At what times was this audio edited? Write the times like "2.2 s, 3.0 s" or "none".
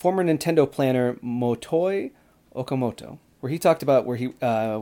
none